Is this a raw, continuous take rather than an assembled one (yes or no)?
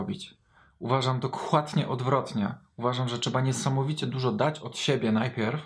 yes